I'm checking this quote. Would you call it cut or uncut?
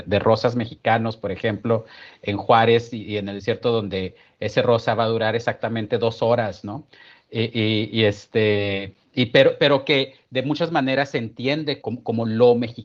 cut